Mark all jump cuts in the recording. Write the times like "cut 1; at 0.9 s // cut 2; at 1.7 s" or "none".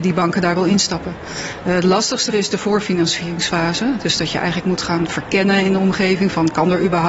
cut 1; at 2.3 s